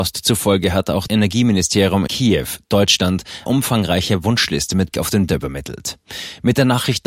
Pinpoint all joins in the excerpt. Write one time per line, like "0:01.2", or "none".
0:01.1
0:02.1
0:03.5
0:04.9
0:05.3